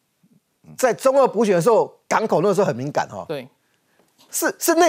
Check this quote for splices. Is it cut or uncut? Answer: uncut